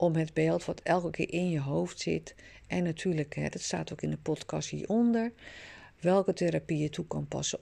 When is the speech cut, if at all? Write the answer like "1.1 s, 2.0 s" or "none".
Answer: none